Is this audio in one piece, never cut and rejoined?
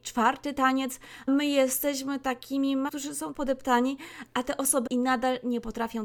no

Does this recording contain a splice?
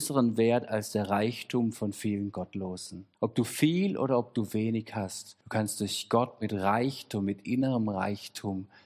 yes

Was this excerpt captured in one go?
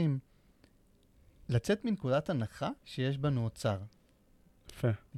no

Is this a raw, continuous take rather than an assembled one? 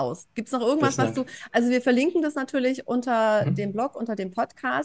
yes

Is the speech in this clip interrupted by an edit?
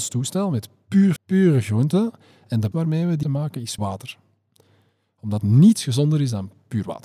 yes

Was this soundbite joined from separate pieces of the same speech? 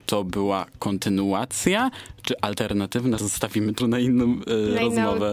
yes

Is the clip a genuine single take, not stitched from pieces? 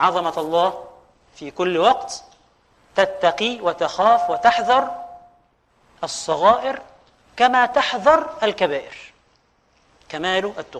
yes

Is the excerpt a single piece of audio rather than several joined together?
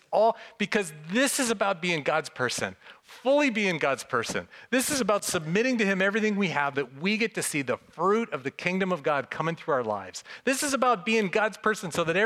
no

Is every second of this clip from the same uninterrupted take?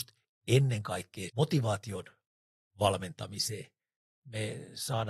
no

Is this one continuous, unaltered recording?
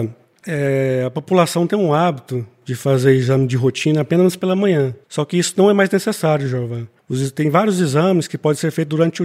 no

